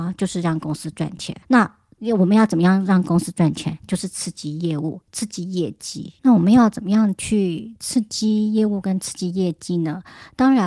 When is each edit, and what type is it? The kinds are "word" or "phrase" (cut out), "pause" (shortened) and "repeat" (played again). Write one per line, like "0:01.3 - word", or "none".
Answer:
0:01.4 - pause
0:06.2 - pause

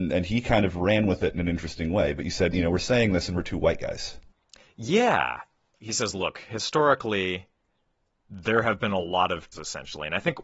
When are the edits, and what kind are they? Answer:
0:02.5 - word
0:09.5 - word

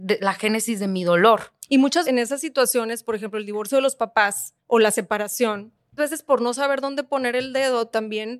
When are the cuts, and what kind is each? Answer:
0:02.0 - phrase
0:04.6 - pause
0:06.0 - word

